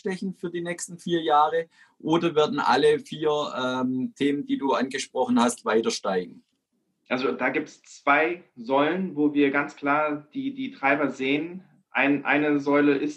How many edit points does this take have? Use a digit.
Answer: 0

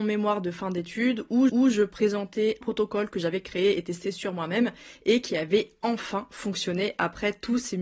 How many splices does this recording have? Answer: 2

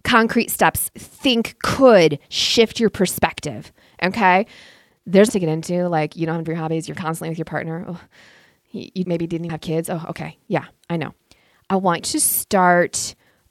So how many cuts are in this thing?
8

